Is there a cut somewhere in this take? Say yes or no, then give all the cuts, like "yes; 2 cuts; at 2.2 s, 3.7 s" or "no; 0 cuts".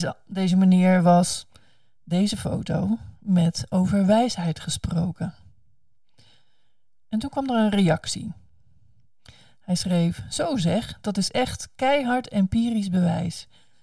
no; 0 cuts